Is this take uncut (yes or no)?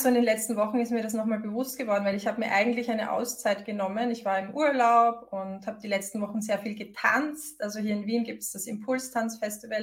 yes